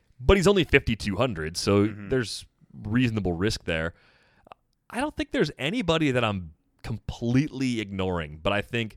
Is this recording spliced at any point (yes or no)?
no